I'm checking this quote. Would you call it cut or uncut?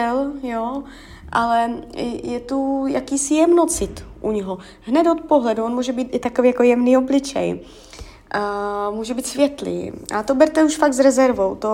cut